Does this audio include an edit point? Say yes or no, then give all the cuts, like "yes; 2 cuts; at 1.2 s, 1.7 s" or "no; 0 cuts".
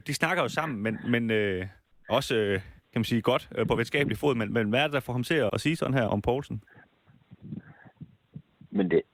yes; 3 cuts; at 4.5 s, 5.5 s, 6.1 s